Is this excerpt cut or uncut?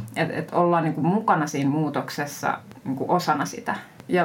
uncut